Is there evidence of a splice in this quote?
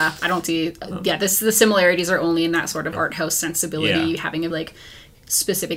yes; 2 cuts; at 2.9 s, 4.5 s

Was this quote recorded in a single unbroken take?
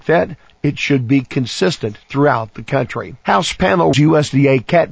no; 3 cuts; at 2.0 s, 3.2 s, 3.9 s

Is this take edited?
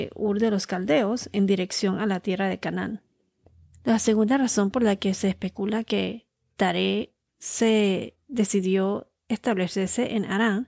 no; 0 cuts

